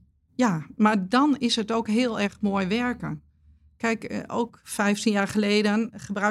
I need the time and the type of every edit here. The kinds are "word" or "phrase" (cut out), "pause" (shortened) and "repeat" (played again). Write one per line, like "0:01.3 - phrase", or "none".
none